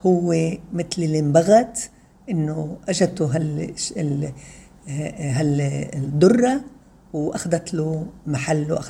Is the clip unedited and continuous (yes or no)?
yes